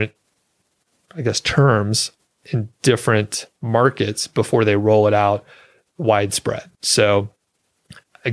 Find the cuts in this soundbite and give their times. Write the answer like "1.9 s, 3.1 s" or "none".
6.7 s